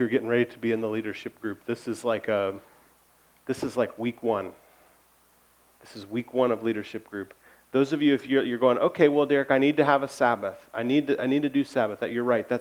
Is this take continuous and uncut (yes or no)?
yes